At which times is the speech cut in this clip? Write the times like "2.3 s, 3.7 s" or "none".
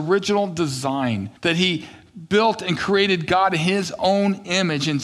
1.4 s